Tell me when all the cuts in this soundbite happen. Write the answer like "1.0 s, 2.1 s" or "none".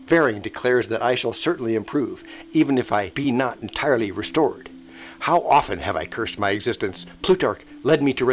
none